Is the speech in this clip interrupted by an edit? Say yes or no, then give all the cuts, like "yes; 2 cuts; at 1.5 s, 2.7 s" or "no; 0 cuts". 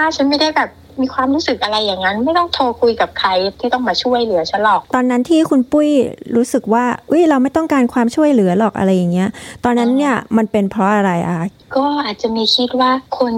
yes; 1 cut; at 4.9 s